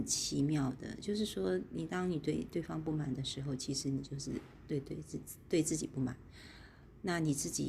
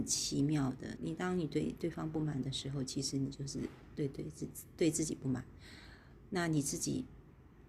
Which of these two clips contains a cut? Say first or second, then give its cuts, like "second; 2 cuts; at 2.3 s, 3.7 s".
second; 1 cut; at 1.0 s